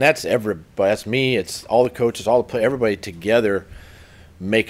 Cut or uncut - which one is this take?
uncut